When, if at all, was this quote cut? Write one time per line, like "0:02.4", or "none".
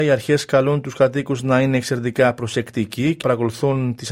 0:03.2

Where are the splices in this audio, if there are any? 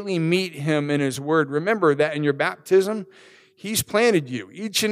none

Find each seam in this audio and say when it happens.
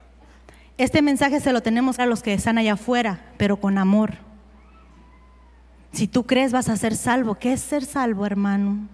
0:02.0

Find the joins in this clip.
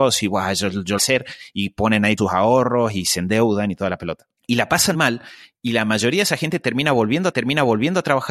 0:01.0
0:02.2
0:04.4
0:04.9
0:07.3

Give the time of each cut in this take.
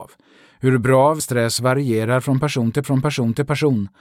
0:01.2
0:02.8

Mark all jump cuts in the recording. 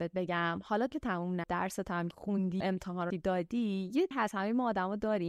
0:00.9
0:01.4
0:02.1
0:02.6
0:03.1
0:04.1

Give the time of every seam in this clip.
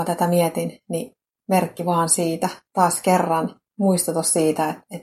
none

